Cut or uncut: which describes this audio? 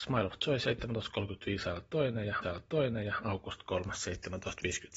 cut